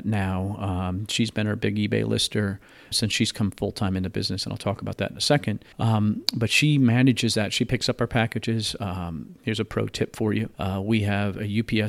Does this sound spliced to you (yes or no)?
yes